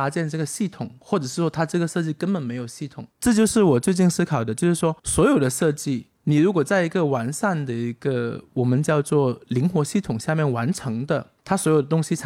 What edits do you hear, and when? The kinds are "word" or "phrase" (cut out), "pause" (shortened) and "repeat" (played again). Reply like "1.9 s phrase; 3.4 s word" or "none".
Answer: 5.0 s pause; 6.1 s pause

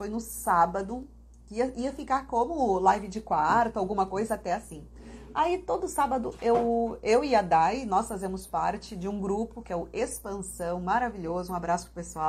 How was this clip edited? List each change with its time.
none

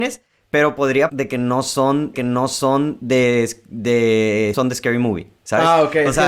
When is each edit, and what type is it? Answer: 1.1 s word; 2.1 s repeat; 4.5 s word

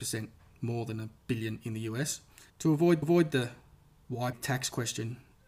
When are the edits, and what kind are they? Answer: 1.2 s pause; 2.5 s pause; 3.0 s repeat; 4.3 s word

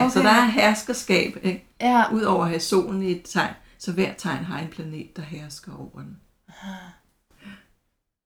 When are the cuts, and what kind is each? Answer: none

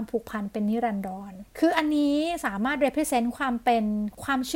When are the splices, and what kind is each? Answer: 1.5 s pause

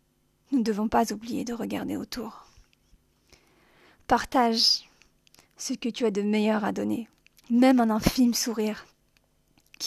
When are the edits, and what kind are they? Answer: none

